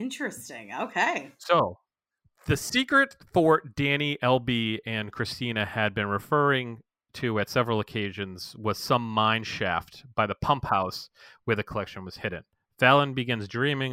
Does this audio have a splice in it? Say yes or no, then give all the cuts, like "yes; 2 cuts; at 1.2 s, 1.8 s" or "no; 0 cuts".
no; 0 cuts